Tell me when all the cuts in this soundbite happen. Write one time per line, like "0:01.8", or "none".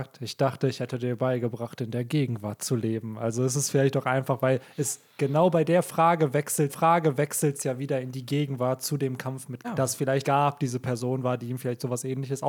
0:06.7
0:09.6
0:10.2